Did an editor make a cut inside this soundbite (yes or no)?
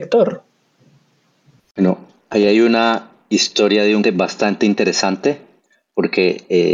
yes